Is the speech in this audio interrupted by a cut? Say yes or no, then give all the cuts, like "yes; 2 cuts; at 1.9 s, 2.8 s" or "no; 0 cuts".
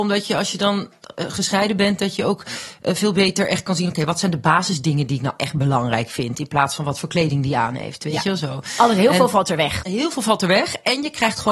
no; 0 cuts